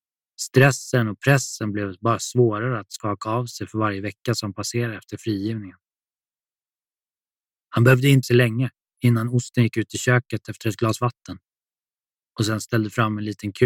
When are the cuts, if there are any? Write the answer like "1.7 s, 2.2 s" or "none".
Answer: 8.2 s

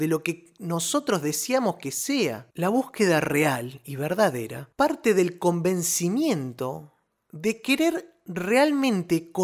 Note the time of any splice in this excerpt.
2.5 s, 4.7 s

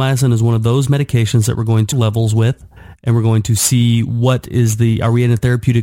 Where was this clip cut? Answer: 1.9 s

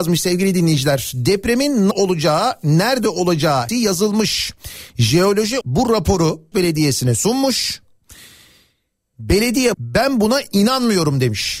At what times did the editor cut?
1.9 s, 3.7 s, 5.6 s, 6.5 s, 9.7 s

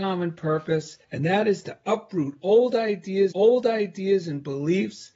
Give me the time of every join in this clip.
1.0 s, 3.3 s

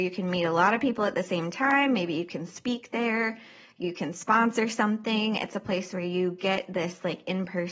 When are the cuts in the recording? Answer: none

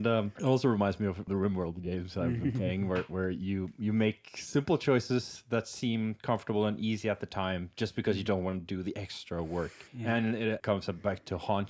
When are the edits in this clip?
9.9 s

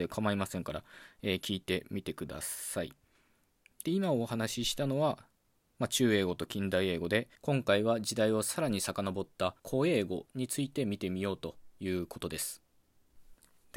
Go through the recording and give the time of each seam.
7.3 s, 9.6 s

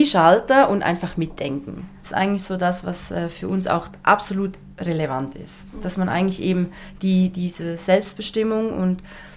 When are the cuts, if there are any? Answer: none

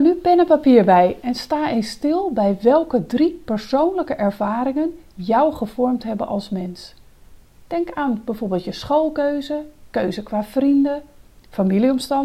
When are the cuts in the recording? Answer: none

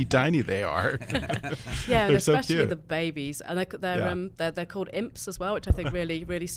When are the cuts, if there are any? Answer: none

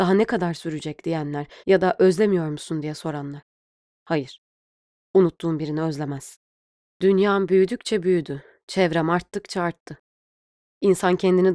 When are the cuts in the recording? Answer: 1.6 s

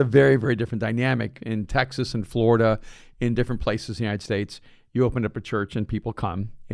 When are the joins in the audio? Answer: none

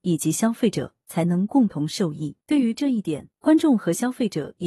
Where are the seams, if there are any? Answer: 2.4 s, 3.3 s

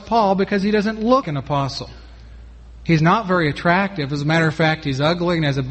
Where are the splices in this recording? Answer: 1.2 s

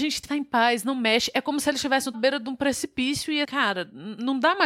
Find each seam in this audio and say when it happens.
2.1 s, 3.4 s

